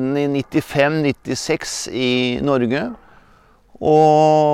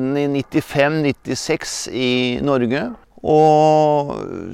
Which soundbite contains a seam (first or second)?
second